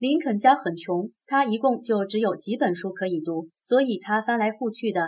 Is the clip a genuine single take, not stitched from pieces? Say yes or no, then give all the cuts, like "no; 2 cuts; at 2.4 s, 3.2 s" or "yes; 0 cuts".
no; 2 cuts; at 1.2 s, 3.5 s